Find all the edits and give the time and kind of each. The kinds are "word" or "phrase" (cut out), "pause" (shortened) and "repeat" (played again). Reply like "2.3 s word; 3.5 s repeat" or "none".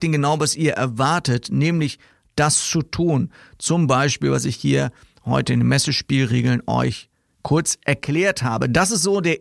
none